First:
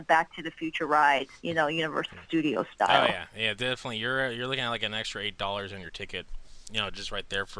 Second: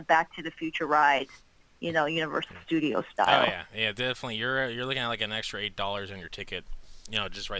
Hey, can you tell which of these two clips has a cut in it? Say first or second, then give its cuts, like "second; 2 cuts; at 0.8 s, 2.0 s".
first; 1 cut; at 1.4 s